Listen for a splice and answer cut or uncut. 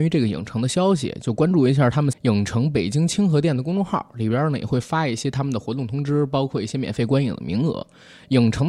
cut